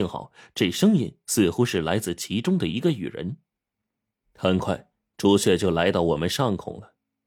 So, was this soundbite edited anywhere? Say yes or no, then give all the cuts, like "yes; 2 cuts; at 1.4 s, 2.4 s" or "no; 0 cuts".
no; 0 cuts